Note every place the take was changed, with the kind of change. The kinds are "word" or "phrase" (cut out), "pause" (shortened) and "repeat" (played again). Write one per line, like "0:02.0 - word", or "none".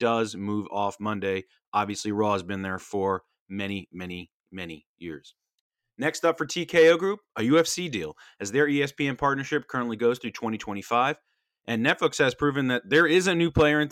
none